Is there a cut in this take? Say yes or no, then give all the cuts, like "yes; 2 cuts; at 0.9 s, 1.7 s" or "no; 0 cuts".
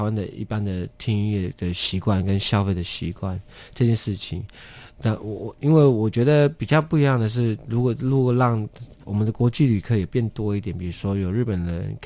yes; 1 cut; at 9.0 s